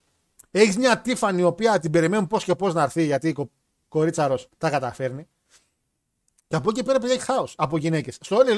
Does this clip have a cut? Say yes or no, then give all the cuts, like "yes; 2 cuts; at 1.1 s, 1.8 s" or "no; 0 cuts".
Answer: yes; 2 cuts; at 4.5 s, 7.2 s